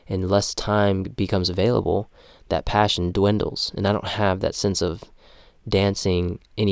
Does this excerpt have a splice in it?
no; 0 cuts

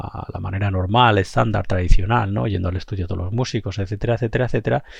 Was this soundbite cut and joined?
no; 0 cuts

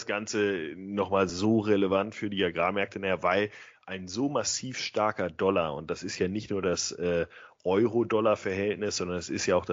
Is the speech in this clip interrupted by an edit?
no; 0 cuts

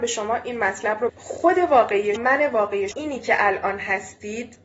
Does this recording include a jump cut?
yes; 3 cuts; at 1.1 s, 2.2 s, 2.9 s

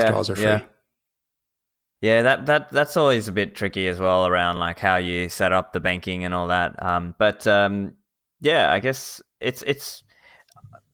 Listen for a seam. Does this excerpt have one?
no; 0 cuts

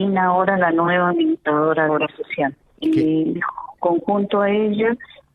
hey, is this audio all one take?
no; 3 cuts; at 1.9 s, 2.6 s, 3.4 s

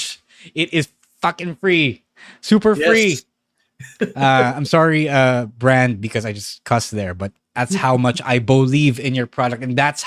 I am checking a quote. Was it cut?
no; 0 cuts

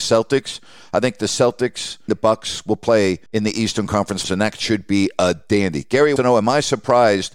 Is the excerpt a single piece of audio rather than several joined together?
no; 4 cuts; at 2.1 s, 3.3 s, 4.2 s, 6.2 s

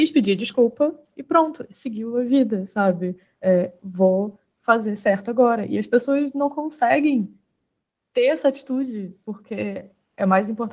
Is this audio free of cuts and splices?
yes; 0 cuts

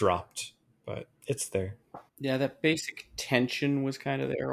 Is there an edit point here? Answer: yes; 2 cuts; at 1.2 s, 2.1 s

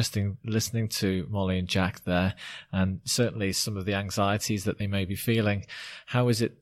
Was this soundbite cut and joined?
no; 0 cuts

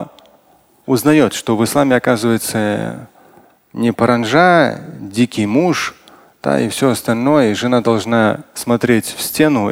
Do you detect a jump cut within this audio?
no; 0 cuts

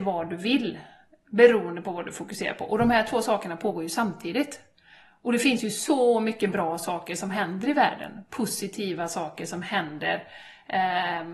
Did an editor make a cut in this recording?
no; 0 cuts

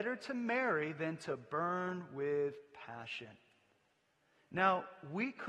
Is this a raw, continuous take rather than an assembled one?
yes; 0 cuts

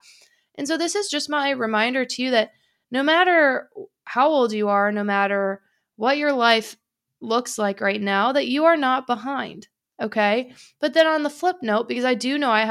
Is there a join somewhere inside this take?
no; 0 cuts

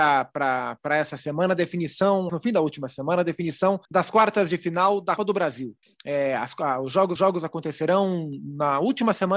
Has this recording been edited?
yes; 5 cuts; at 2.3 s, 3.8 s, 5.2 s, 5.8 s, 7.2 s

